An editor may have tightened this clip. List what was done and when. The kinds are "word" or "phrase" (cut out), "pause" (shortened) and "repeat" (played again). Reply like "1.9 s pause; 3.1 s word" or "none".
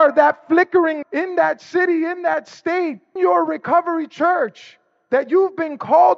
1.0 s word; 3.2 s word